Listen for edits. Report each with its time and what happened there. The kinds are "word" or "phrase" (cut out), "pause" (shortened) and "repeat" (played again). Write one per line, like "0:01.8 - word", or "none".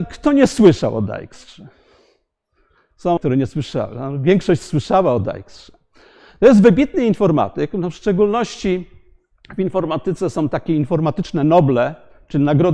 0:03.2 - word